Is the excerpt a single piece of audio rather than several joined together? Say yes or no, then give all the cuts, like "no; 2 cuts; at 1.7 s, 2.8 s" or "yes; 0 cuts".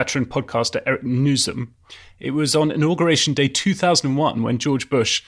yes; 0 cuts